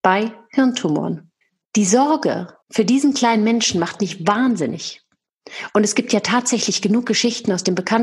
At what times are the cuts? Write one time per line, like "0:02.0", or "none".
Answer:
0:01.4
0:02.6